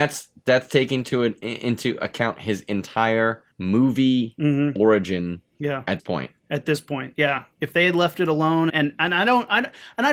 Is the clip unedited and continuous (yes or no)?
no